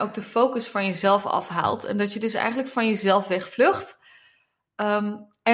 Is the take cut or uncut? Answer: uncut